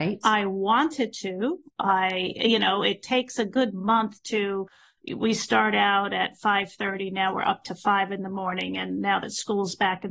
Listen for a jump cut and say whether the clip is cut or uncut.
uncut